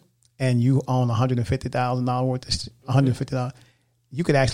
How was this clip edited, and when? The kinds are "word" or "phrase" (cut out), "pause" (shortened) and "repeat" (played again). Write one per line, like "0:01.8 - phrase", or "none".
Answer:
0:02.8 - word